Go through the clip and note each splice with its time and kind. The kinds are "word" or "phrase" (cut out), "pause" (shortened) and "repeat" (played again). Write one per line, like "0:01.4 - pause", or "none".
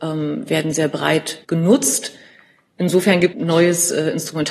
0:01.4 - pause
0:03.3 - phrase